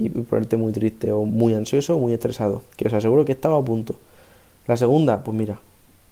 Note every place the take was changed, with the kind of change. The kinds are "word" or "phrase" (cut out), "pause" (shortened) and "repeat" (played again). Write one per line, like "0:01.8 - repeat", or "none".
0:02.7 - pause